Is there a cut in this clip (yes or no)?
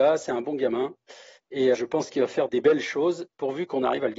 yes